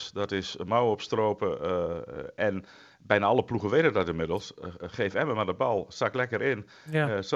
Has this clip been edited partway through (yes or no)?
no